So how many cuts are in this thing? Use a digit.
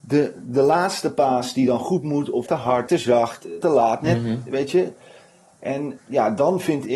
4